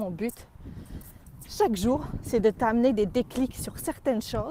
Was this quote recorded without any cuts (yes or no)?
yes